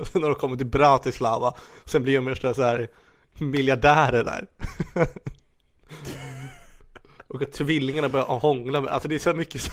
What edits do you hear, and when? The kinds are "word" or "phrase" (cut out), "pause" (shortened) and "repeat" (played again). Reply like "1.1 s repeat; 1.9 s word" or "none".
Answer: none